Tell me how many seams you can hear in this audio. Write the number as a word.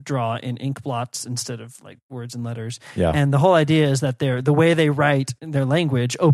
zero